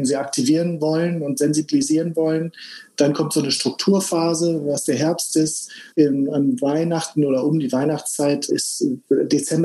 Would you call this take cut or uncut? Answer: cut